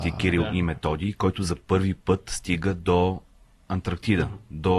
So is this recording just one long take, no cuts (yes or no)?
yes